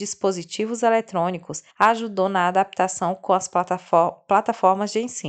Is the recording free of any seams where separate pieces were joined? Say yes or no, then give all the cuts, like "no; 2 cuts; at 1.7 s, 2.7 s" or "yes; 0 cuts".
no; 1 cut; at 1.7 s